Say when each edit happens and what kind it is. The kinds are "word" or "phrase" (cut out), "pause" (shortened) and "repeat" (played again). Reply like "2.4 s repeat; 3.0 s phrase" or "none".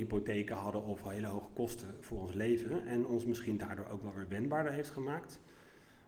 none